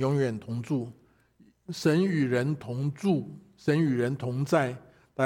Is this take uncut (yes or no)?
yes